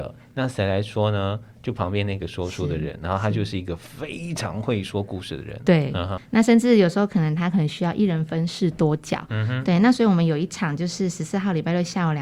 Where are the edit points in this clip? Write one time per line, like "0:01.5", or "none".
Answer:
0:06.2